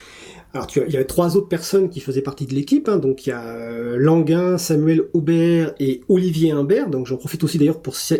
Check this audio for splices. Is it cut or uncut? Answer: uncut